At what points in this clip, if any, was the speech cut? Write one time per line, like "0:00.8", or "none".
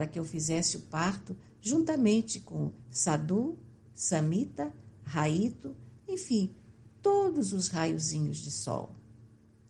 none